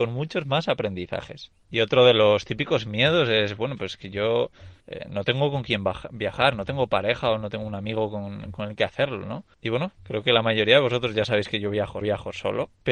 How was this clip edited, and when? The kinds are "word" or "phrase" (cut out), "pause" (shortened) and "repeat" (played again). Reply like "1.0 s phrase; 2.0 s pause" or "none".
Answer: 4.8 s pause; 12.0 s repeat